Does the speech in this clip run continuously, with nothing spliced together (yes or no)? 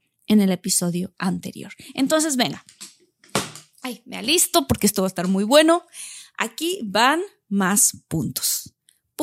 yes